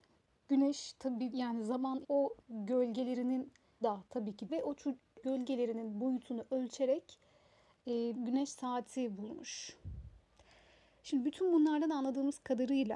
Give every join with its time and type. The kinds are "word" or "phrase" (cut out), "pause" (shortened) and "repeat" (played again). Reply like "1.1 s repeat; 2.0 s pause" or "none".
1.3 s word; 2.0 s word; 2.4 s word; 3.8 s word; 4.5 s word; 5.2 s word; 8.1 s word